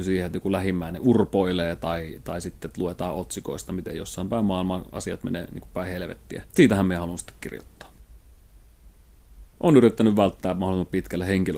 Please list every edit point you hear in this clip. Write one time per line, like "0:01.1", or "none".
0:06.5